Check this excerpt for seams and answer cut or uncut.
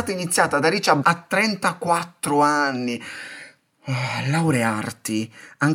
cut